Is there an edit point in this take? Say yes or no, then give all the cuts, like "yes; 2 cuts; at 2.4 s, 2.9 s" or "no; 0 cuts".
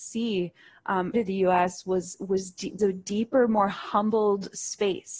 yes; 2 cuts; at 1.1 s, 2.8 s